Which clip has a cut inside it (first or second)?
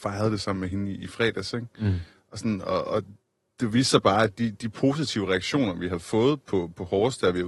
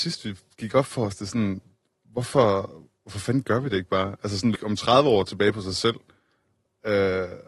second